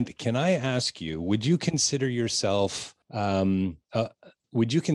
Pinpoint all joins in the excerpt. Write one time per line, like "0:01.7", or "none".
0:03.0